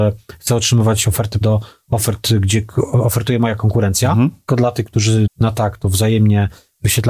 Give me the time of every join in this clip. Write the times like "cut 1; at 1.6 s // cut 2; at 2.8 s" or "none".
cut 1; at 1.4 s // cut 2; at 4.5 s // cut 3; at 5.3 s